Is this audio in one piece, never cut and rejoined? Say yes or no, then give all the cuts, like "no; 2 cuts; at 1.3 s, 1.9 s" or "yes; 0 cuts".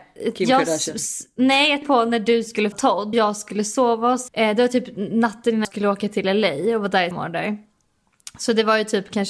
no; 6 cuts; at 1.8 s, 2.7 s, 3.1 s, 4.3 s, 5.6 s, 7.1 s